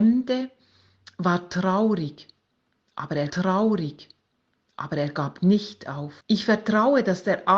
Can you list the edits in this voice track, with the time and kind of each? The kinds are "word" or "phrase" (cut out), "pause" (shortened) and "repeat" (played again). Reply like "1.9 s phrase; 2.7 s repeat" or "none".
3.3 s repeat; 6.2 s pause